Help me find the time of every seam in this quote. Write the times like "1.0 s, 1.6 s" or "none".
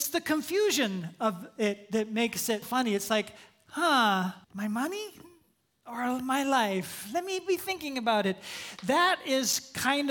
2.6 s, 4.4 s